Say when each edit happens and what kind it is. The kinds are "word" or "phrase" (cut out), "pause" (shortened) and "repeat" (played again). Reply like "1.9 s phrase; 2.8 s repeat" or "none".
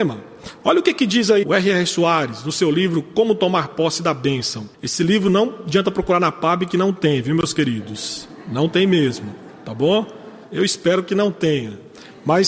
1.4 s word; 4.7 s pause; 10.4 s pause

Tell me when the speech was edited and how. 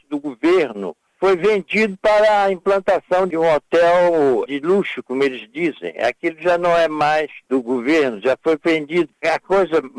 7.4 s pause

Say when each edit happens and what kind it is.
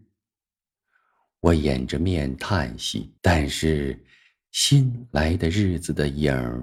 3.2 s pause

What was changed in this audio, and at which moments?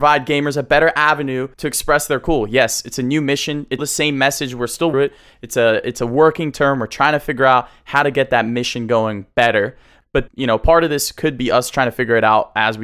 1.5 s pause; 3.8 s word; 4.9 s phrase; 10.3 s word

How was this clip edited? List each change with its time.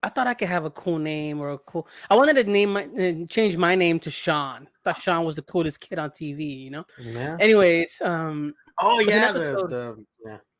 6.9 s pause

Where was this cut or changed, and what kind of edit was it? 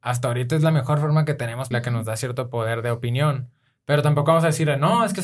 1.7 s phrase

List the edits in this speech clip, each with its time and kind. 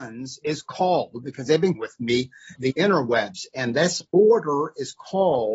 1.7 s word; 2.5 s phrase

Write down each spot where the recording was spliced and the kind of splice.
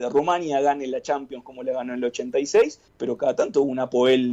2.9 s pause

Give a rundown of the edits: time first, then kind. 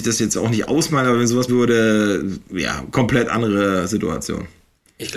1.5 s word

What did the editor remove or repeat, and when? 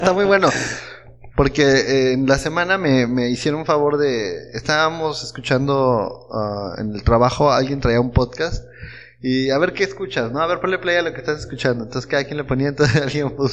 1.3 s pause

